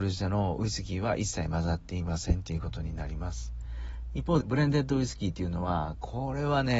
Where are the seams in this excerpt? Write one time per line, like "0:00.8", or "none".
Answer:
0:04.4